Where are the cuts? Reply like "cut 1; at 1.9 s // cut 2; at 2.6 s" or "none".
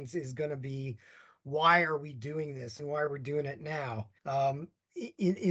cut 1; at 4.2 s